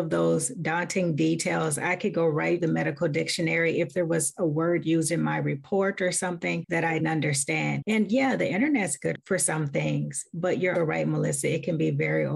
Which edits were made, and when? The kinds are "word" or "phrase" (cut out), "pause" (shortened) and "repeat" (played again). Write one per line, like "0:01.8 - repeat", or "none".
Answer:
0:02.6 - word
0:07.0 - word
0:10.7 - word